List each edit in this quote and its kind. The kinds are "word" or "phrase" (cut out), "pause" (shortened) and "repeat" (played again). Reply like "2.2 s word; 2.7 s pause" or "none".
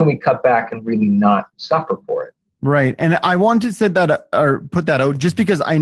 none